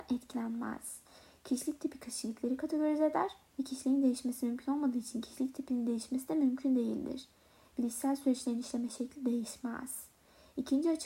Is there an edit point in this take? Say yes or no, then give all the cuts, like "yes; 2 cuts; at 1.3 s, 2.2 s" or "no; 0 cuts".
no; 0 cuts